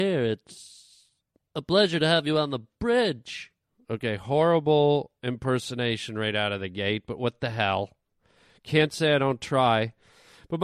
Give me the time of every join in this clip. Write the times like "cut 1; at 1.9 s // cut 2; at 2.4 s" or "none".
none